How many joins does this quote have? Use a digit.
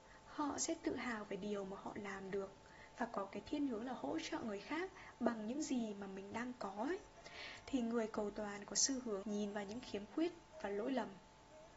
1